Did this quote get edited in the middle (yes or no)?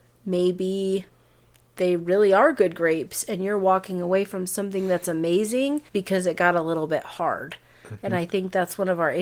yes